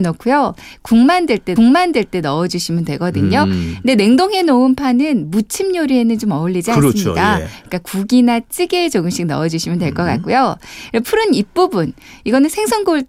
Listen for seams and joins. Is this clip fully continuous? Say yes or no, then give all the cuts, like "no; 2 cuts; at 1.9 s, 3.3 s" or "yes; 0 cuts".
no; 1 cut; at 1.6 s